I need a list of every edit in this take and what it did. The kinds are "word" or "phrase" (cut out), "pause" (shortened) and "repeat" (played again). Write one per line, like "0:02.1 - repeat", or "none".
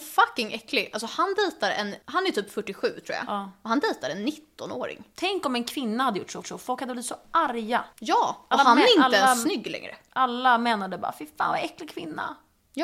0:02.0 - pause
0:06.4 - repeat
0:07.9 - pause